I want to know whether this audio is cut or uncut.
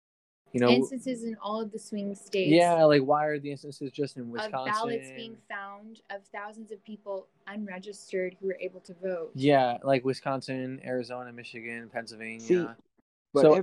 uncut